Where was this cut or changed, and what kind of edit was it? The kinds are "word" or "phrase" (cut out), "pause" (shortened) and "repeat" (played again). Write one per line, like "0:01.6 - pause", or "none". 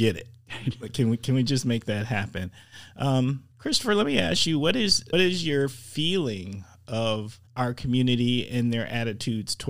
0:03.5 - pause
0:05.1 - word
0:07.5 - pause